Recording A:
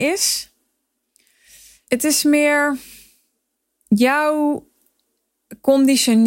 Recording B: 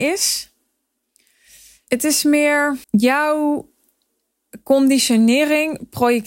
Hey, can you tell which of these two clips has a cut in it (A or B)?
B